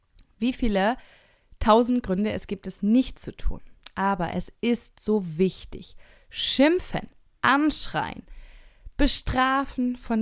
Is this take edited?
no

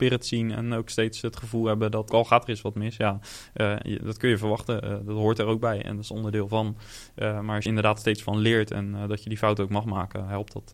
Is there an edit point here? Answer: yes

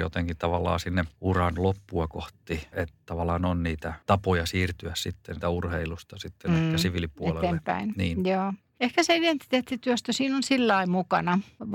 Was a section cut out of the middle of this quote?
yes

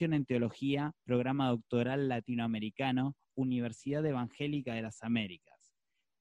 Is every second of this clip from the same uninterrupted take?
yes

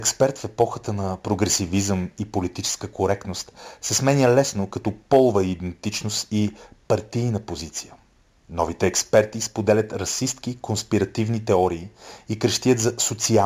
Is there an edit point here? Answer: no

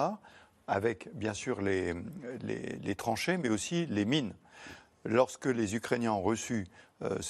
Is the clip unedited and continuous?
yes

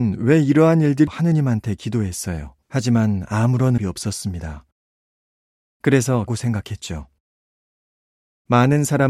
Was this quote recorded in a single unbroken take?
no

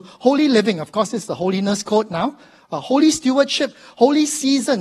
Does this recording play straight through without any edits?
yes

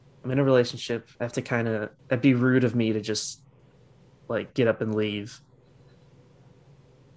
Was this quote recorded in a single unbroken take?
no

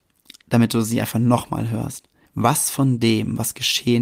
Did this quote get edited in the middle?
yes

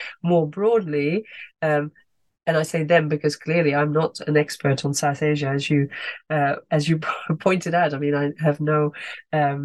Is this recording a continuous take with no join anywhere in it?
yes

